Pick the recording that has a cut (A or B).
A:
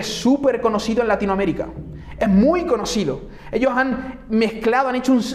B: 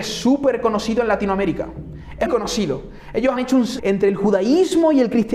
B